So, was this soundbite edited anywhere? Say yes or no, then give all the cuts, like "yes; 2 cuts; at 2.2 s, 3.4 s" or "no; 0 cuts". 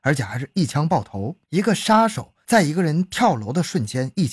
yes; 1 cut; at 1.4 s